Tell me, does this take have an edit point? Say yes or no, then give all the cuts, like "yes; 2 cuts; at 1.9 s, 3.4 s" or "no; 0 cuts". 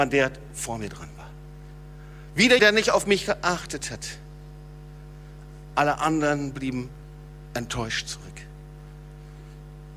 yes; 1 cut; at 2.6 s